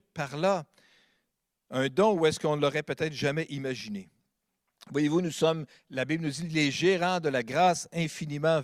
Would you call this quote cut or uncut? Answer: uncut